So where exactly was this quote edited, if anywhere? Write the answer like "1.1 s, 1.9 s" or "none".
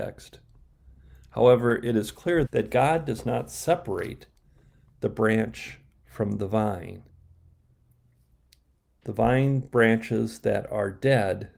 2.5 s